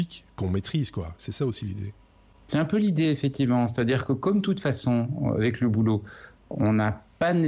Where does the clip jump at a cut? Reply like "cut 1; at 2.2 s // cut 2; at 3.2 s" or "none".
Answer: none

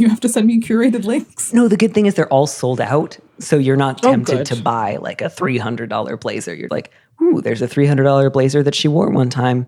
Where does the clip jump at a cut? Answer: cut 1; at 6.7 s

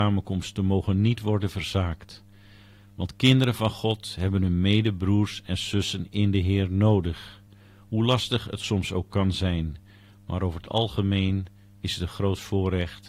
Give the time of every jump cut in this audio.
none

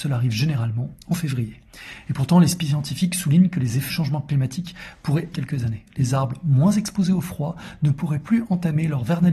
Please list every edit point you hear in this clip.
cut 1; at 3.9 s // cut 2; at 5.3 s

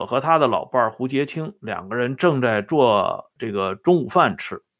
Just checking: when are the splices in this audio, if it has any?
cut 1; at 3.4 s

